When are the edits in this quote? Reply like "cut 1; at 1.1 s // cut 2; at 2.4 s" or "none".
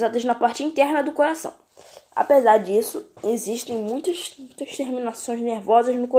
cut 1; at 3.1 s